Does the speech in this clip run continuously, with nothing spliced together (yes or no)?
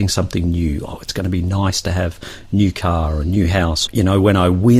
no